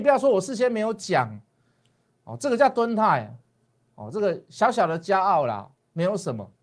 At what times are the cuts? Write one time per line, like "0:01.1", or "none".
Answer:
none